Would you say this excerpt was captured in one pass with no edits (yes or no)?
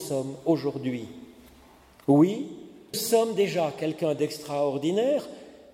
no